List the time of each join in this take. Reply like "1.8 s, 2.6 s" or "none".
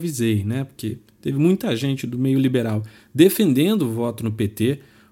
none